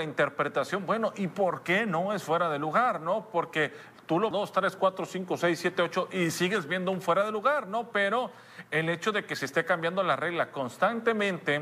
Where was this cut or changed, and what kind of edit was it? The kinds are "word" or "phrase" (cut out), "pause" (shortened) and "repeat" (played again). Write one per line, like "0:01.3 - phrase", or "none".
0:04.3 - phrase